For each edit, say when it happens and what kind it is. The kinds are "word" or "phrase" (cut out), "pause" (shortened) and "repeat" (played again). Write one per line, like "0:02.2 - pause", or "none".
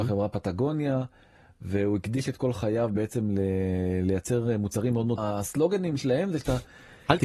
0:05.2 - phrase